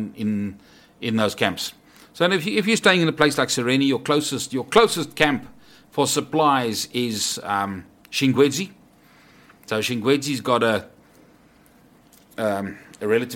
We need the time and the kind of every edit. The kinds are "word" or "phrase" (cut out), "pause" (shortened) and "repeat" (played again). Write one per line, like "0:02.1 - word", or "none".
none